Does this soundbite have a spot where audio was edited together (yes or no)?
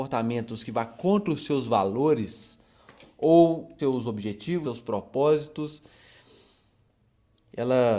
yes